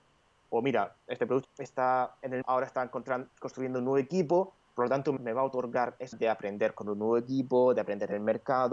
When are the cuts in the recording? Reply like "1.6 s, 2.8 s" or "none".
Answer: 1.4 s, 2.4 s, 3.3 s, 5.2 s, 6.1 s